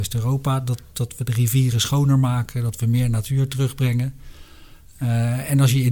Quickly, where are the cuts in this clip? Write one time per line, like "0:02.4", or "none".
none